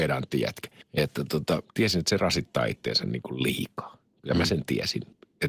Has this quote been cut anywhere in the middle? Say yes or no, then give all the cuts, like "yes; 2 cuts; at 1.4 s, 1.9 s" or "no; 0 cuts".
yes; 1 cut; at 1.6 s